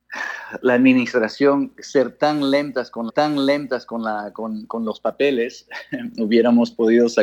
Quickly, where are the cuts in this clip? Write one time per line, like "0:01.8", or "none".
0:03.1